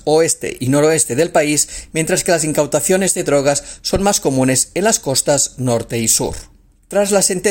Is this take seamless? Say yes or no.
yes